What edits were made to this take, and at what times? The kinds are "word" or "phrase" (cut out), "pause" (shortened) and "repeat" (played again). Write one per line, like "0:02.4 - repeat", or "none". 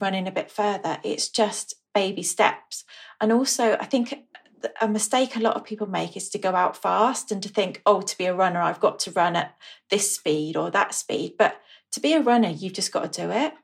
none